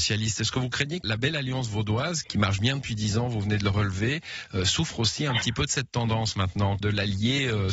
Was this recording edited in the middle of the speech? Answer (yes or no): yes